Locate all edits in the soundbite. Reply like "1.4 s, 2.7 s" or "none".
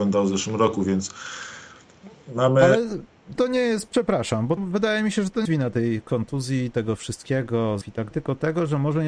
3.4 s, 4.6 s, 5.5 s, 7.8 s, 8.1 s